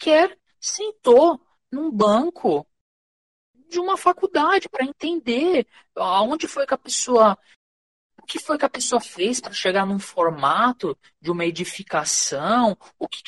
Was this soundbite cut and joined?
no; 0 cuts

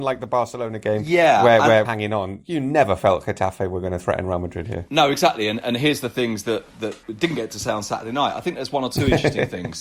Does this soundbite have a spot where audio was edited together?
yes; 2 cuts; at 1.8 s, 7.0 s

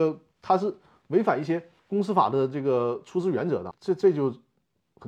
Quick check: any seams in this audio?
yes; 2 cuts; at 1.8 s, 3.7 s

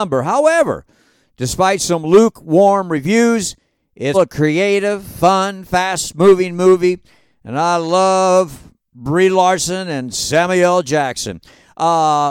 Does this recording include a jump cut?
yes; 1 cut; at 4.1 s

